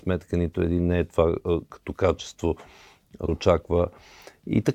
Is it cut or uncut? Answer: cut